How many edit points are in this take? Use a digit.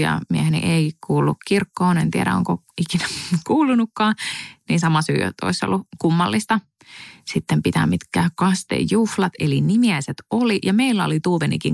0